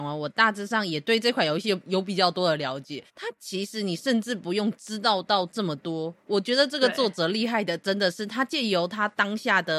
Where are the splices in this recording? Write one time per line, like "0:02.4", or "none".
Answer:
0:03.1

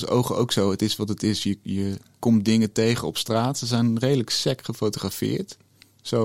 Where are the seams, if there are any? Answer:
none

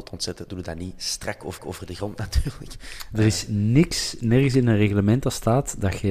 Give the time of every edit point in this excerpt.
0:01.6

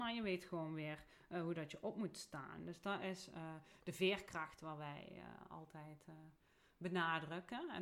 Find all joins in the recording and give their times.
none

